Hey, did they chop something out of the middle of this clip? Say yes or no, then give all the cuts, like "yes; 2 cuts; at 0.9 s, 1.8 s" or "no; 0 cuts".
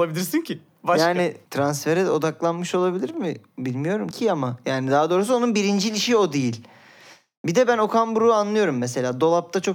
yes; 2 cuts; at 1.4 s, 4.1 s